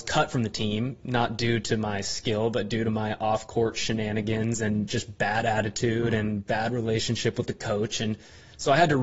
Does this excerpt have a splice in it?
no; 0 cuts

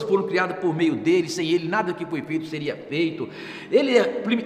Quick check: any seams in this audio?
no; 0 cuts

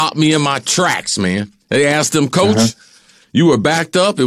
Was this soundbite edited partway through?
yes; 1 cut; at 1.6 s

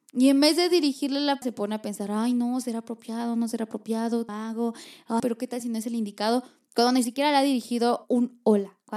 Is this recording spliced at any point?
yes; 3 cuts; at 1.4 s, 4.3 s, 5.2 s

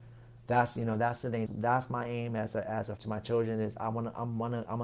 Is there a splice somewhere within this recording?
yes; 2 cuts; at 1.5 s, 3.0 s

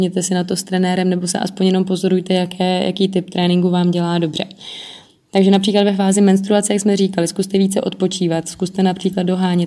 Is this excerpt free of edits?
yes; 0 cuts

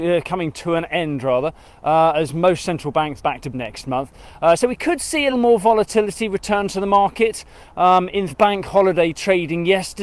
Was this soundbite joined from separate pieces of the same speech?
yes; 4 cuts; at 3.2 s, 3.5 s, 5.3 s, 8.3 s

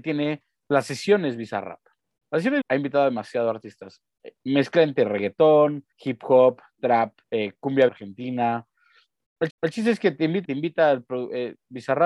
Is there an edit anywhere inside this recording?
yes; 7 cuts; at 2.2 s, 2.6 s, 5.9 s, 7.2 s, 7.9 s, 9.5 s, 10.4 s

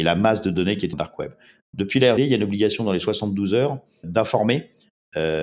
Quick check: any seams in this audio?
yes; 3 cuts; at 0.9 s, 2.2 s, 4.0 s

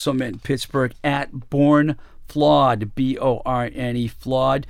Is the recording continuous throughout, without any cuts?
yes; 0 cuts

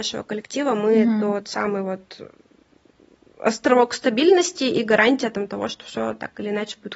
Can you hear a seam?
no; 0 cuts

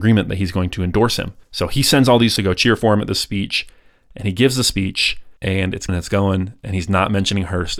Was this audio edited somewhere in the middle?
yes; 4 cuts; at 1.4 s, 2.4 s, 5.4 s, 5.9 s

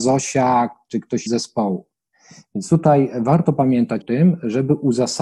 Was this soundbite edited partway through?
yes; 2 cuts; at 1.3 s, 4.0 s

